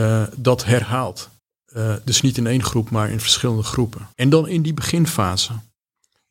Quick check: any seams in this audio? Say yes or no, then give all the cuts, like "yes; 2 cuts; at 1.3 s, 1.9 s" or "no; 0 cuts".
yes; 2 cuts; at 1.4 s, 4.1 s